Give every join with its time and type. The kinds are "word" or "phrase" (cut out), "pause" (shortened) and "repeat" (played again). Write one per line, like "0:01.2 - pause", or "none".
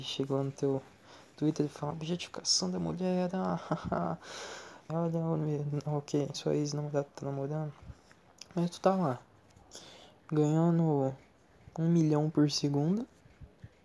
0:01.9 - word
0:04.9 - word
0:06.3 - word